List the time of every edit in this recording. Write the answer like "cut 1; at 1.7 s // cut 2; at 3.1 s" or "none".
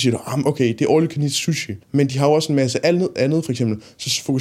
cut 1; at 1.8 s